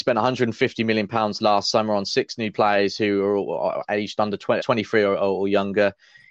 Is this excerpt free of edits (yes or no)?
no